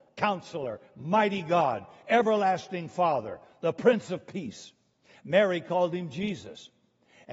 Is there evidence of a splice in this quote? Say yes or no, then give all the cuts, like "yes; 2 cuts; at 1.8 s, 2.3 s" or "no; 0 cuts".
no; 0 cuts